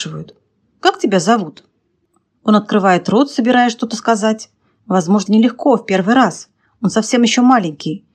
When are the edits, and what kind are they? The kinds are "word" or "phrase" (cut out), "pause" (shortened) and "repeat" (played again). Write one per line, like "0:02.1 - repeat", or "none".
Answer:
0:05.3 - word